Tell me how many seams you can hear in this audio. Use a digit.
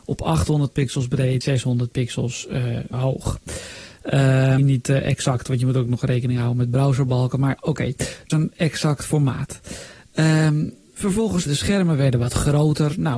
6